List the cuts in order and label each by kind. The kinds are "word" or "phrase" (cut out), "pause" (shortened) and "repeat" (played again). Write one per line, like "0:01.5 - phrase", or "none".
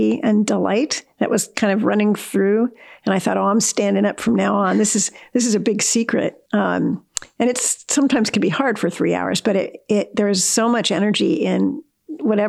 0:06.5 - word